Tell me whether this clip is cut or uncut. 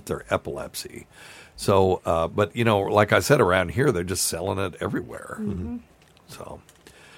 uncut